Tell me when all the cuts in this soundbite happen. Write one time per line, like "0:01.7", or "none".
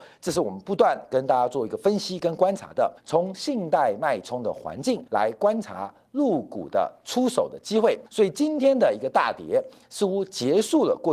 0:03.0
0:05.1
0:08.1